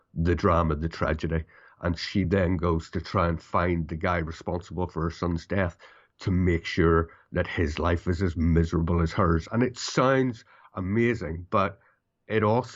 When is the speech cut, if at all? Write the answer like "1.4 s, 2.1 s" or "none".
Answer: none